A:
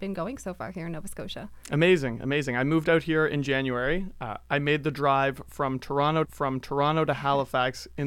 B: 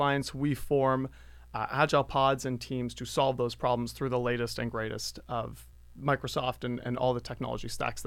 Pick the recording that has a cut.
A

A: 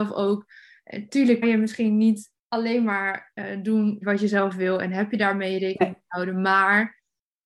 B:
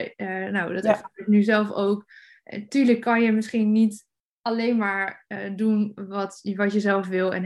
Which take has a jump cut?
A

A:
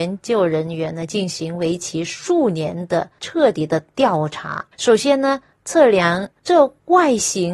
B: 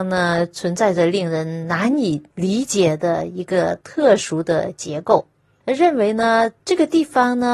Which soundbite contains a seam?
A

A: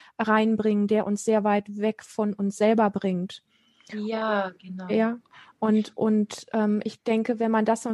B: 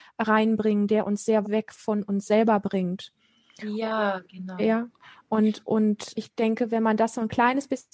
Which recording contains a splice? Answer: B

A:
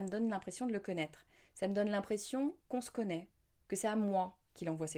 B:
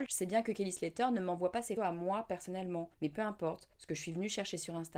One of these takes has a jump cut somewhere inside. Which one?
B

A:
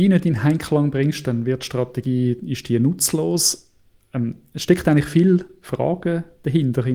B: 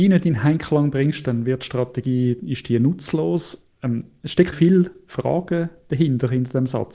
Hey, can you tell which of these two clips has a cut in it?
B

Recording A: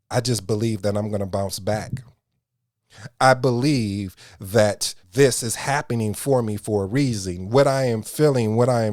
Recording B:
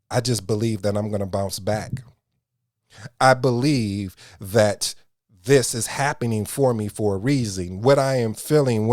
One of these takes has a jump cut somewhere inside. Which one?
A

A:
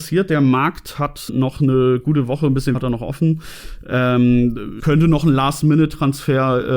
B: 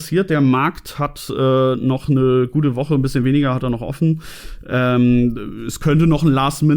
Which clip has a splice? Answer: A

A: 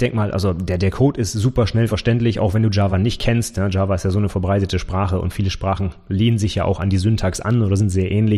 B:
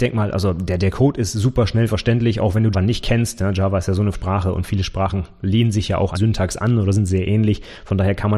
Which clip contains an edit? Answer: B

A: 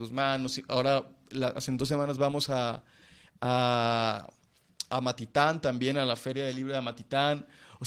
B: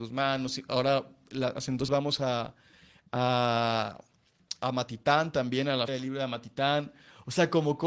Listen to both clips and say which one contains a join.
B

